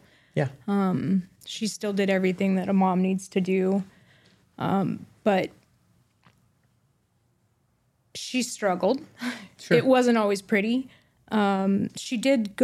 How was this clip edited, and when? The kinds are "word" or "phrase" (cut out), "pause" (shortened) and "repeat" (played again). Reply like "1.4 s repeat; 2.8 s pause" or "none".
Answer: 1.4 s pause

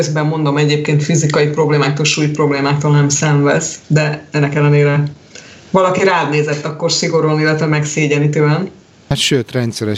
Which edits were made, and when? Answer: none

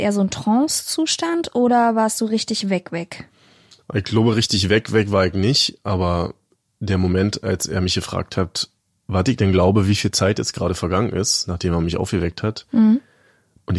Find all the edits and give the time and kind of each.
none

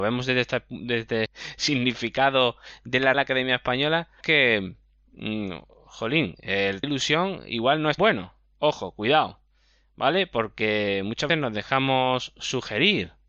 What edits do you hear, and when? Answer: 1.3 s word; 3.1 s word; 4.2 s word; 6.8 s word; 8.0 s word; 11.3 s word

